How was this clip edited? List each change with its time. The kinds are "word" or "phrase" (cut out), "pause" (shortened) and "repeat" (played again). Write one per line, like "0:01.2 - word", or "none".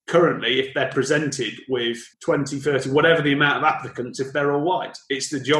0:02.1 - pause